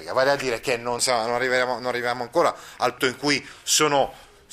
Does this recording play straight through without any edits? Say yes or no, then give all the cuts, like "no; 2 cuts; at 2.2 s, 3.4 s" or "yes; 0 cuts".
no; 2 cuts; at 1.0 s, 3.0 s